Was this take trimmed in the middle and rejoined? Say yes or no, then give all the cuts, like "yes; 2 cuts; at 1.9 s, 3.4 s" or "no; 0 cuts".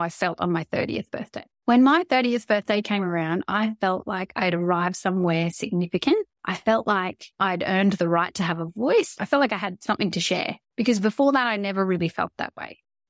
yes; 4 cuts; at 1.5 s, 6.4 s, 7.3 s, 9.2 s